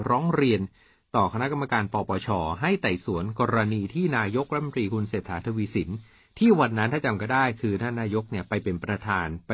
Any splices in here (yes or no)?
no